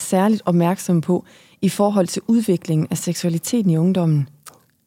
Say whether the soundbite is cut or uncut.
uncut